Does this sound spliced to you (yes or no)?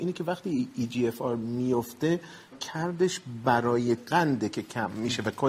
yes